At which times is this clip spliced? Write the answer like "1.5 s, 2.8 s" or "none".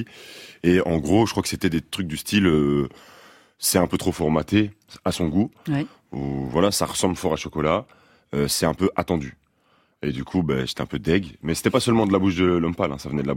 none